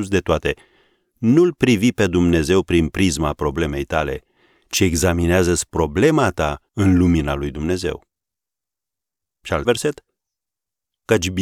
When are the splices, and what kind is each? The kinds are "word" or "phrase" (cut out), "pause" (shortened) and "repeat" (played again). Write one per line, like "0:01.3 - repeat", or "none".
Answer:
0:06.7 - pause
0:09.6 - word

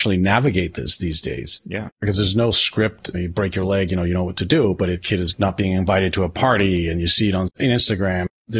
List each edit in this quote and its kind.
none

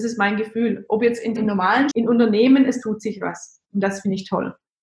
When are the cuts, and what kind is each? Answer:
0:01.4 - word
0:01.9 - word

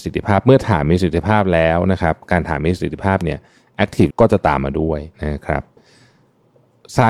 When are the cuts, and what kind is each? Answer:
0:04.1 - word
0:05.1 - pause

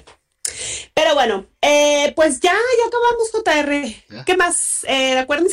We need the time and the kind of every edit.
none

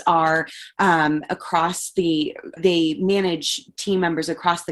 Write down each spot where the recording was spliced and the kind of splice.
0:02.6 - word

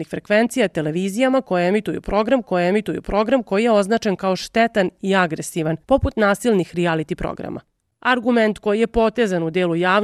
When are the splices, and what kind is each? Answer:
0:02.4 - repeat
0:05.8 - pause

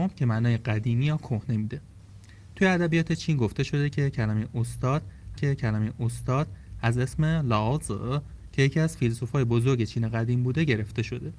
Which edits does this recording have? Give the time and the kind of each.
0:05.4 - repeat

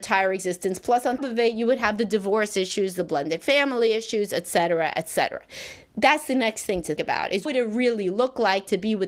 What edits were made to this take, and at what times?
0:01.2 - word
0:07.0 - word
0:07.5 - word

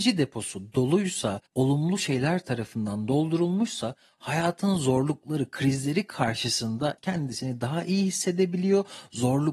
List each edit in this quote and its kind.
0:01.5 - pause
0:07.0 - word

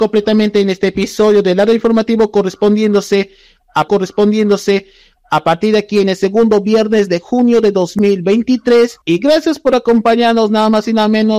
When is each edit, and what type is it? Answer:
0:03.9 - repeat
0:09.0 - pause

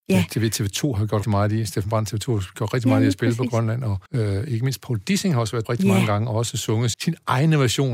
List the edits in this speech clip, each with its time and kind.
0:01.2 - word
0:04.1 - pause
0:05.6 - word
0:06.9 - word

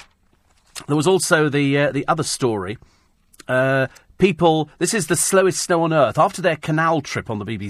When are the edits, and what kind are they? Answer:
none

